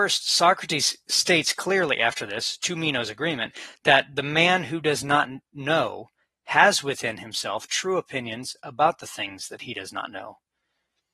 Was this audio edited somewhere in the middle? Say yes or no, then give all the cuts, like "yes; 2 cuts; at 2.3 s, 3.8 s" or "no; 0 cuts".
no; 0 cuts